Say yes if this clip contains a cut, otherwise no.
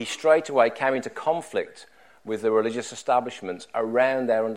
no